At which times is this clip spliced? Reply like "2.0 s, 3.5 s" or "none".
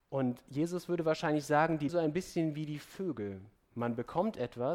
1.9 s, 3.6 s